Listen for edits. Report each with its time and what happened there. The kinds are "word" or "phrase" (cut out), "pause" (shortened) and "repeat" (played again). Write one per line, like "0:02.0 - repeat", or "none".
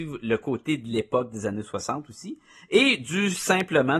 none